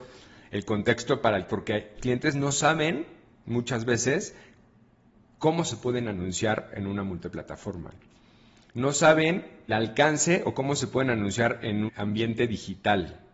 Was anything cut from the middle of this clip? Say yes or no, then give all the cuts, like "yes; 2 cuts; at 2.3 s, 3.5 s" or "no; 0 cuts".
yes; 4 cuts; at 1.5 s, 2.0 s, 9.7 s, 11.9 s